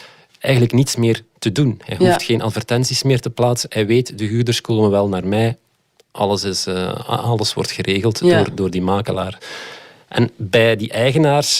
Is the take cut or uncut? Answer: uncut